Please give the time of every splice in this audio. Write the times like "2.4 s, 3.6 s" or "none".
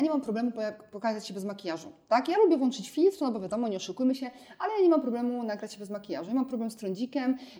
none

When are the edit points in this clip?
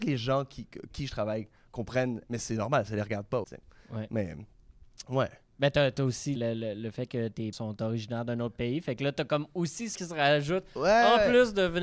0.9 s, 2.3 s, 3.4 s, 6.4 s, 7.5 s, 9.9 s

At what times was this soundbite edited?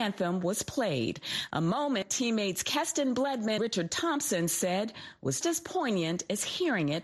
3.6 s, 5.4 s

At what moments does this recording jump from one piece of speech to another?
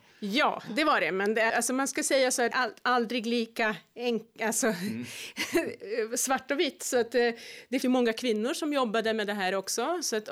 1.5 s, 2.5 s, 7.8 s

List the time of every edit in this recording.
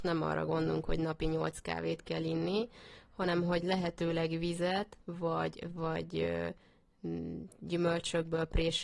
5.0 s

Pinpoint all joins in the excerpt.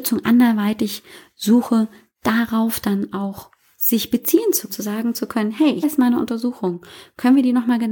4.7 s, 5.8 s

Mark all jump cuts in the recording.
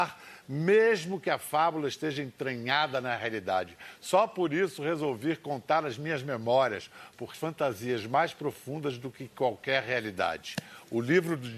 7.3 s

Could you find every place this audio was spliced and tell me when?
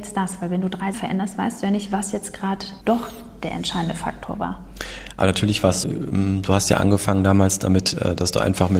0.9 s, 2.8 s, 5.8 s

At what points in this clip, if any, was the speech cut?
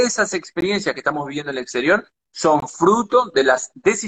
none

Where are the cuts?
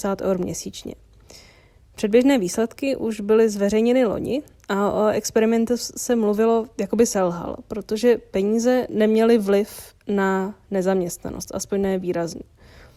none

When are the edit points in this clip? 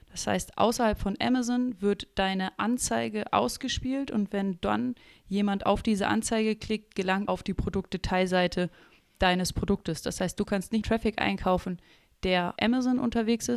7.3 s, 10.8 s, 12.6 s

